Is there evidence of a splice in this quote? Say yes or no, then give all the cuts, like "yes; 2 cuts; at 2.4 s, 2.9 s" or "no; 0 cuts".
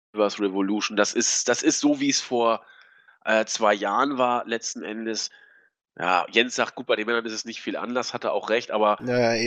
no; 0 cuts